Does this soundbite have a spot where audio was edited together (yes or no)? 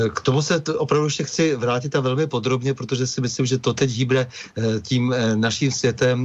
no